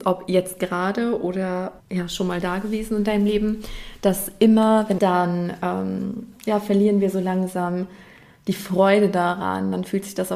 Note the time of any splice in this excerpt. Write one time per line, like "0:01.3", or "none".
0:01.8
0:05.0